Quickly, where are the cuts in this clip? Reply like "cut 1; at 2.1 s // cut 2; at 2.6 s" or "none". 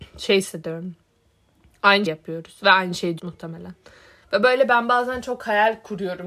cut 1; at 2.1 s // cut 2; at 3.2 s